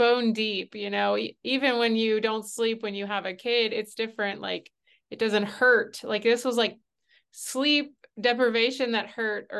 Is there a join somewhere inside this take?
no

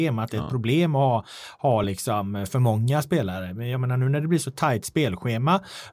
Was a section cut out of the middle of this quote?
no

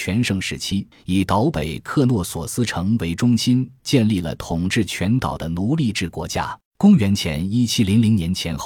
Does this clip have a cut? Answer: yes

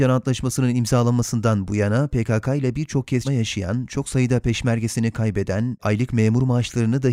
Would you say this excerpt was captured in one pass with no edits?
no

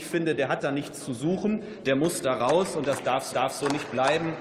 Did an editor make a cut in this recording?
yes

